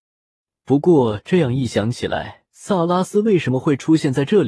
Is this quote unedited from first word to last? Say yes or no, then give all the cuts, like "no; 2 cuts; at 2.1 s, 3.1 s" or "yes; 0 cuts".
no; 1 cut; at 2.5 s